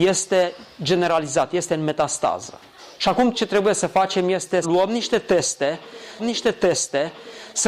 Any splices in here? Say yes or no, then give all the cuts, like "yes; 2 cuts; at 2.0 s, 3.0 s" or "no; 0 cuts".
yes; 4 cuts; at 2.9 s, 3.3 s, 4.6 s, 6.2 s